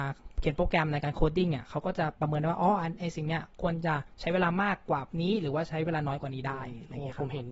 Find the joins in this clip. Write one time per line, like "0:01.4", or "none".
0:05.1